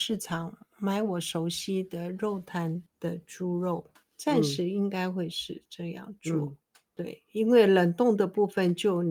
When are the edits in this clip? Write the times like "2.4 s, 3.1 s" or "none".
2.9 s, 4.0 s, 6.9 s